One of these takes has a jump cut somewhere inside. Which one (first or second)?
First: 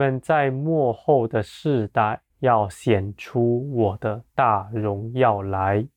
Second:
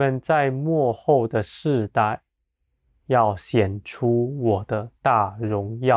first